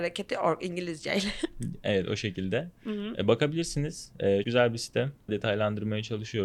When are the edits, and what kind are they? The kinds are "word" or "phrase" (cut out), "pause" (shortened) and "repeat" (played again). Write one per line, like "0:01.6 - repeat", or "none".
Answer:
0:04.4 - word
0:05.3 - phrase

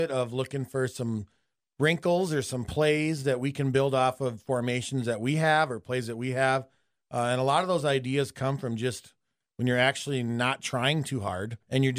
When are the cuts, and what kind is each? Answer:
none

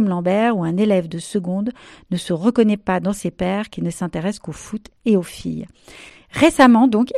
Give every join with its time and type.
none

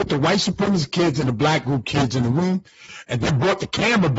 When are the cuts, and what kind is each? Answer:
none

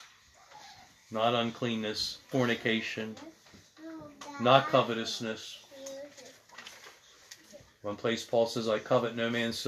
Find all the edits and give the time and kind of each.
0:02.3 - word

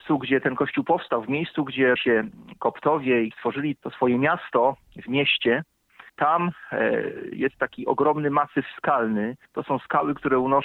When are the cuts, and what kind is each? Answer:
0:02.0 - word
0:03.3 - word
0:03.8 - word
0:06.1 - pause
0:09.5 - pause

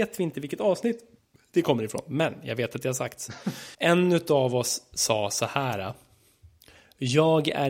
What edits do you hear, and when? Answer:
0:01.2 - pause
0:03.7 - pause

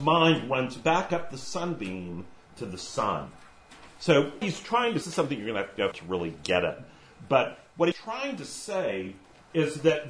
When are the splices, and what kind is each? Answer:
0:04.4 - word
0:05.0 - phrase
0:05.9 - phrase
0:07.9 - word

